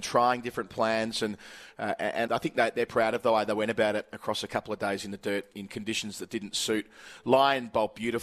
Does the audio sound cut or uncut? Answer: cut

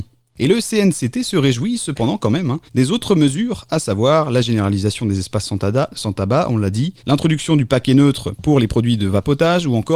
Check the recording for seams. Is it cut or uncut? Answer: cut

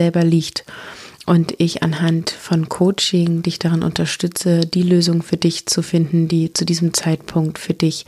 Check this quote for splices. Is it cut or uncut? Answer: uncut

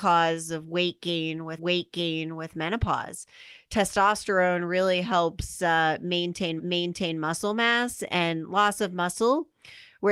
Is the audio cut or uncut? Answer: cut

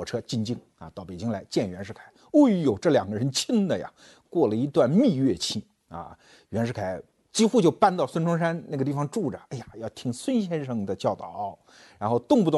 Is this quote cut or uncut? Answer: uncut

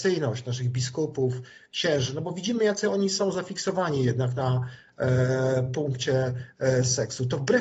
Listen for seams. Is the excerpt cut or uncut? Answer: uncut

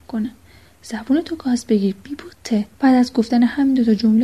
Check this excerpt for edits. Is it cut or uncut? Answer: cut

